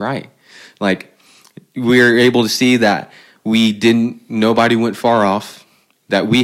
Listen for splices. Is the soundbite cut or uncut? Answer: uncut